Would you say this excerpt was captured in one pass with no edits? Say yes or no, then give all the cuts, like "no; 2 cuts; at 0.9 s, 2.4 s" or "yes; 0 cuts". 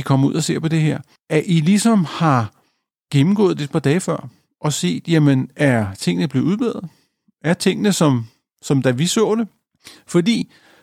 yes; 0 cuts